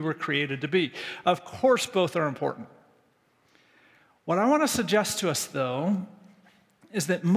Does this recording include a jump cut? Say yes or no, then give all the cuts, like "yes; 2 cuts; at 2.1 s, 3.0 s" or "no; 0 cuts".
no; 0 cuts